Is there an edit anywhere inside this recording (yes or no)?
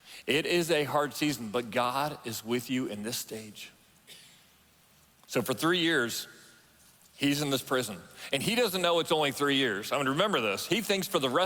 no